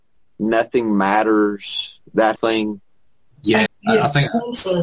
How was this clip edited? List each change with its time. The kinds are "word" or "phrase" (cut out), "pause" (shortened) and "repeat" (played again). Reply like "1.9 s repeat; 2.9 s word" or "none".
2.4 s word; 3.7 s word